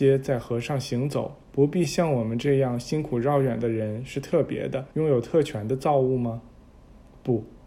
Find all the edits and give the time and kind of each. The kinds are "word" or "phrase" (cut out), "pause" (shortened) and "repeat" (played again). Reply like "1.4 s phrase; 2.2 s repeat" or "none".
1.4 s pause; 4.9 s pause